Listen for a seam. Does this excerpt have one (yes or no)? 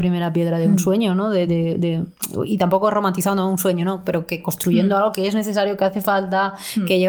no